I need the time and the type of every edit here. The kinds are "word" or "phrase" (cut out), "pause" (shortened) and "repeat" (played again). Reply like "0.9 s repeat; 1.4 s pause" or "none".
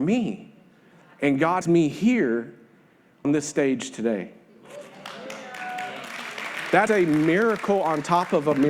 1.6 s word; 3.2 s word; 6.9 s word